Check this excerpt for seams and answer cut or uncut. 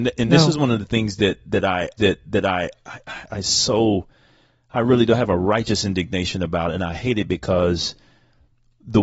cut